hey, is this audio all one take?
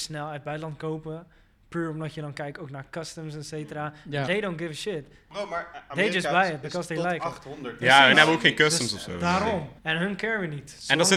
no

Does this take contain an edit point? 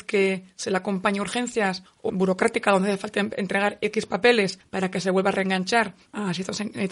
yes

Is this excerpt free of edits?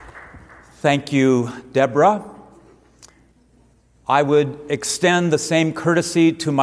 yes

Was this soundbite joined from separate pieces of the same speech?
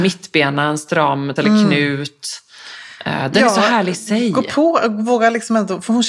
yes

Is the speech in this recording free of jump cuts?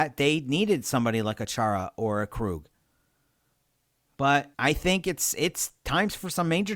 no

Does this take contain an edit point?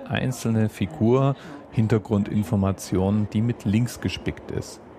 yes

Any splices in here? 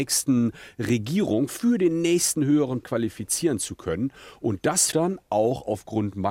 yes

